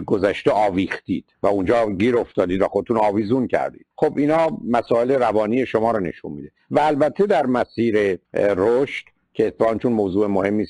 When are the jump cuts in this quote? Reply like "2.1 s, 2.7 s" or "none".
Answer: 1.3 s, 3.9 s, 8.2 s